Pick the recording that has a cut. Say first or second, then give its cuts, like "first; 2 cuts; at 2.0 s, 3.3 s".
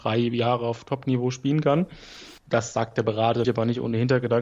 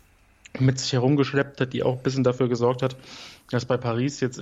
first; 2 cuts; at 2.4 s, 3.4 s